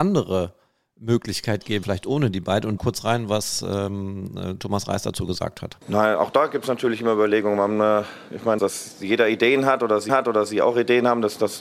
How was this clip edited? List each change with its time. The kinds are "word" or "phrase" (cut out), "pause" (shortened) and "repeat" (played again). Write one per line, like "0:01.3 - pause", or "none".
0:01.8 - word
0:02.8 - phrase
0:05.8 - pause
0:08.6 - word
0:10.1 - repeat

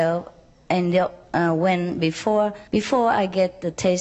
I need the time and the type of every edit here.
0:02.7 - pause

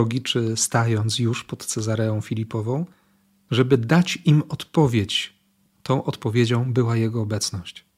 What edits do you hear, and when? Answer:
none

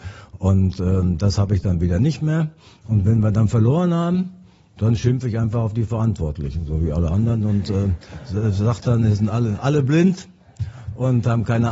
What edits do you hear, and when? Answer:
none

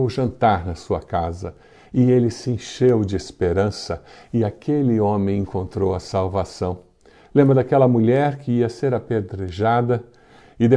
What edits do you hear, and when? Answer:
none

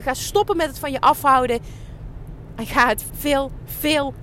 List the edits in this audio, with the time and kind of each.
0:03.1 - word

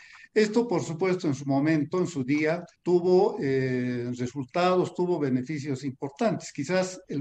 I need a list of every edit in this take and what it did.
0:02.8 - pause

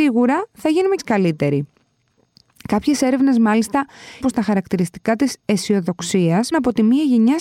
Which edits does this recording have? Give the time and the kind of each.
0:01.0 - word
0:04.2 - word
0:06.5 - word

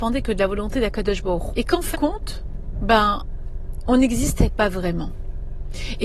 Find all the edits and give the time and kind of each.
0:01.5 - word
0:01.9 - word

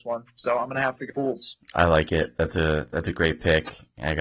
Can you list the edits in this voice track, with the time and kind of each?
0:01.1 - phrase

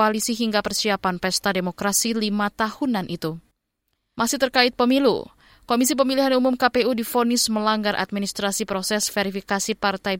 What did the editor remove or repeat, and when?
none

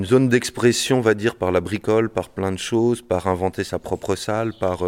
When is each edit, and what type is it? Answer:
none

